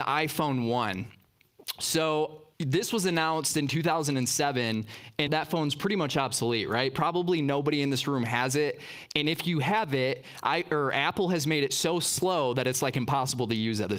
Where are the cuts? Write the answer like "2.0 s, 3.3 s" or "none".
2.5 s, 5.3 s